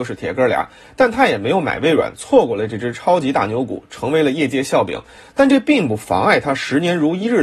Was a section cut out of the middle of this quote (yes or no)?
no